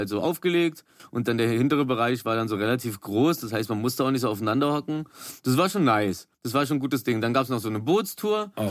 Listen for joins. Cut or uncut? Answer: cut